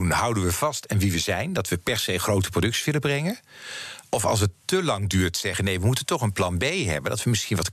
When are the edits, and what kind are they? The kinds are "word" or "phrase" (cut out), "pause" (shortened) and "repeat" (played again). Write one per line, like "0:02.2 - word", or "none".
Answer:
0:04.1 - pause